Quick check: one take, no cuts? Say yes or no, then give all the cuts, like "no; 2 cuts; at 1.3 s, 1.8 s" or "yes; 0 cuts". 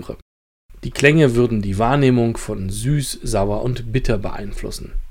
yes; 0 cuts